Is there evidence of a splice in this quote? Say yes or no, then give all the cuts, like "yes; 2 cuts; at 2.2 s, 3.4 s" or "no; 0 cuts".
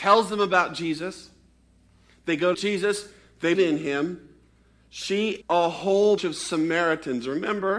yes; 4 cuts; at 2.5 s, 3.5 s, 5.4 s, 6.2 s